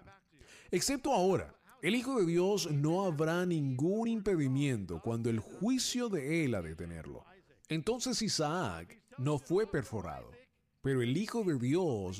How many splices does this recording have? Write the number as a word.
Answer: zero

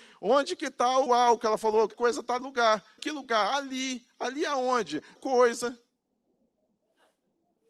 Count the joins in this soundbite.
five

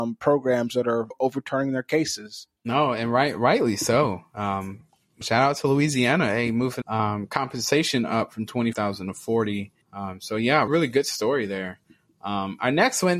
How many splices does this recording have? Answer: seven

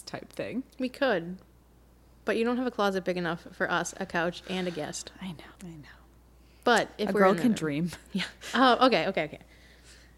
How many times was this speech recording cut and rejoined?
one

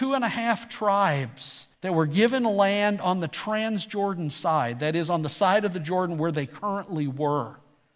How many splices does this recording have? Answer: one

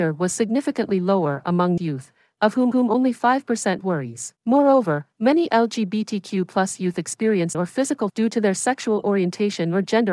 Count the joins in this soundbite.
six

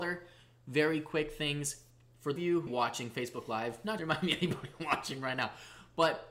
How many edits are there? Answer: three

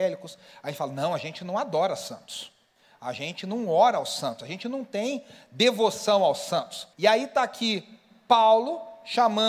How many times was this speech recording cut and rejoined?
one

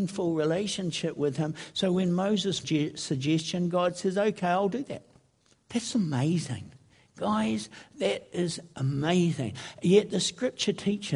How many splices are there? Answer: two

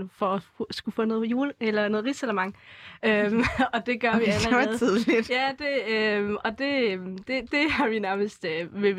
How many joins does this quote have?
zero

